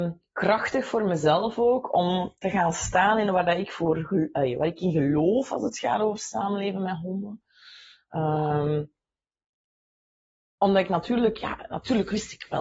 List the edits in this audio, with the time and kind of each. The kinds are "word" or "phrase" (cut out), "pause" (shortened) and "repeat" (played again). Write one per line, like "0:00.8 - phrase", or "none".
none